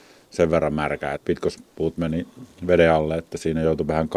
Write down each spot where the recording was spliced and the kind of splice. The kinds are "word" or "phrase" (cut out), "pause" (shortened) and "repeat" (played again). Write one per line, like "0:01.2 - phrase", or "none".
0:01.2 - phrase